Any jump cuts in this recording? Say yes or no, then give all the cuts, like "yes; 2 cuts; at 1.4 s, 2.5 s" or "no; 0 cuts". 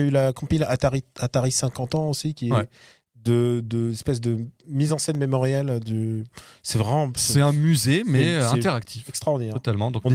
no; 0 cuts